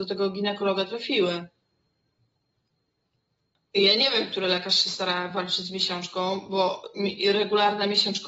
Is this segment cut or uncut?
uncut